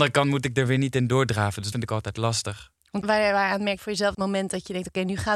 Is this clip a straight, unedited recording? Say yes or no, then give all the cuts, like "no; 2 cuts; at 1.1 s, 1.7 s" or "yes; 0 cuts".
no; 4 cuts; at 1.7 s, 3.0 s, 3.8 s, 4.1 s